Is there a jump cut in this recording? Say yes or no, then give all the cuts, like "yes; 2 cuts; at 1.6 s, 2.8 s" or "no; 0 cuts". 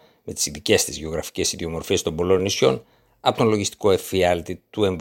no; 0 cuts